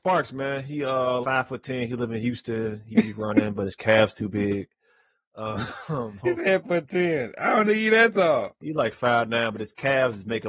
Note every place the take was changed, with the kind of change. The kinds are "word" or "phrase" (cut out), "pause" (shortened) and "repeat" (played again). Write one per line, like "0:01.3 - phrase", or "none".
0:01.2 - word
0:06.2 - word
0:06.6 - word
0:07.6 - word